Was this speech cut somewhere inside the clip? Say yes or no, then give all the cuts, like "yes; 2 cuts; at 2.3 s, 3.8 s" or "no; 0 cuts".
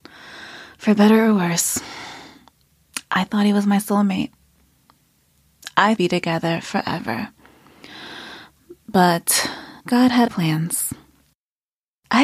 yes; 3 cuts; at 6.0 s, 9.8 s, 10.3 s